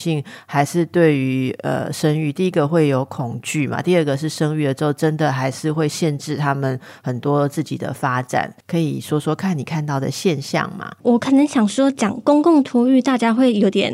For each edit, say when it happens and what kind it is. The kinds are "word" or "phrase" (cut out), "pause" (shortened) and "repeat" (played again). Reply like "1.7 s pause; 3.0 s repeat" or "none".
8.6 s pause